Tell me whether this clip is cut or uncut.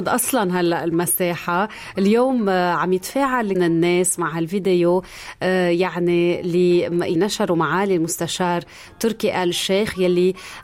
cut